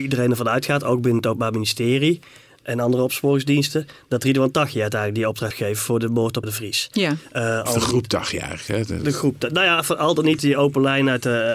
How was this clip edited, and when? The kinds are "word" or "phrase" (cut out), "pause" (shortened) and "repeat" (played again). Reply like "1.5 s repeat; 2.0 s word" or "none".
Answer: 5.5 s word; 6.4 s word; 10.4 s word